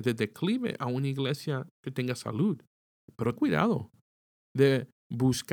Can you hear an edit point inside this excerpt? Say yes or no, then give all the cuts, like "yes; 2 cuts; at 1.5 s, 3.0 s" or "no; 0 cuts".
yes; 1 cut; at 3.4 s